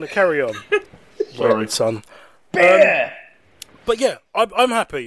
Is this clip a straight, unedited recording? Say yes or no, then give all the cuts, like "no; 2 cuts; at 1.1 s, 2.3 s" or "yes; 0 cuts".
yes; 0 cuts